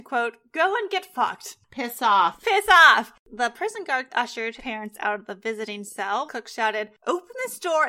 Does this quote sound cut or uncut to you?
cut